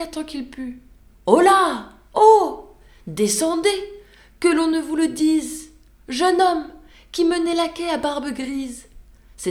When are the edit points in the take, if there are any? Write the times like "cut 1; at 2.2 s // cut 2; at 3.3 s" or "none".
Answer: none